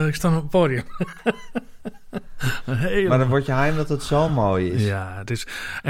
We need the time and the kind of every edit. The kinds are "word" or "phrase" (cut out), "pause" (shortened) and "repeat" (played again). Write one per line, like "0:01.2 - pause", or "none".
none